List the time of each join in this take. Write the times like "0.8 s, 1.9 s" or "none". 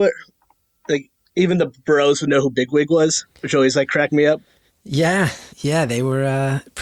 1.3 s, 3.3 s, 5.5 s